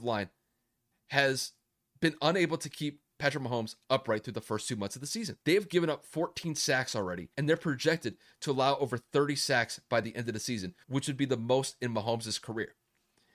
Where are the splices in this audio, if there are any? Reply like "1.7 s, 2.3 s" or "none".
5.4 s, 7.3 s, 10.8 s